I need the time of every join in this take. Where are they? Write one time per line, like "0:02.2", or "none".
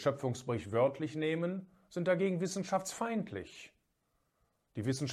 none